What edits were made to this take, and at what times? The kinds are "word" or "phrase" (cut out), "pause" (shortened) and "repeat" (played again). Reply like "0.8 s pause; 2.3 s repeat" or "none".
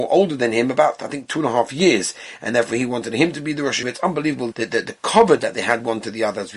3.8 s word; 4.5 s word

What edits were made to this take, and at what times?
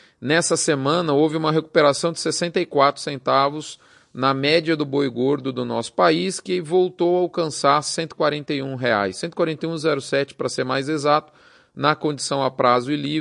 none

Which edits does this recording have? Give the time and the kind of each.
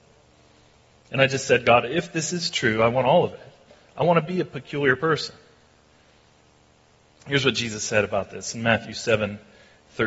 none

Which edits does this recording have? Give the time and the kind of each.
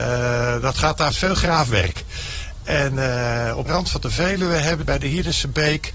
1.1 s phrase; 3.7 s phrase; 4.8 s word

